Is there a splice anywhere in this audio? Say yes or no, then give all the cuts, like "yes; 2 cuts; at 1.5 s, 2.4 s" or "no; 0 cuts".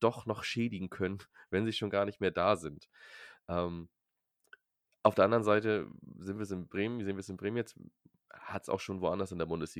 no; 0 cuts